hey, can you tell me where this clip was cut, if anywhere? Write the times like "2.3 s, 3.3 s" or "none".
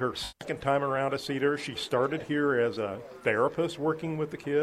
none